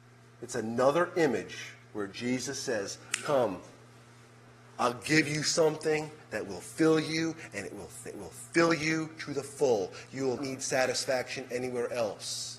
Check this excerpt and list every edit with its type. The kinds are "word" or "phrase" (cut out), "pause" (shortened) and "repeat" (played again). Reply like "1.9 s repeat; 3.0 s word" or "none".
8.1 s repeat; 10.4 s word